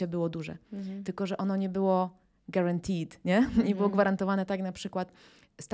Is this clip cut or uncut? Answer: uncut